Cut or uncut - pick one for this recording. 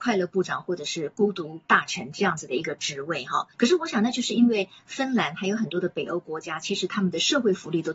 cut